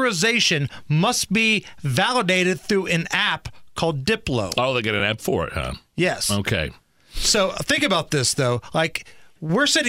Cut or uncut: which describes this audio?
uncut